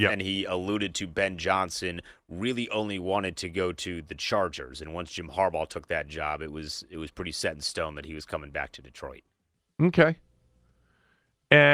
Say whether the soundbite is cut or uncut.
uncut